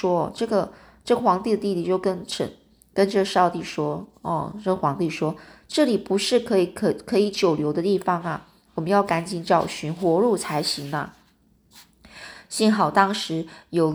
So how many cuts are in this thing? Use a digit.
0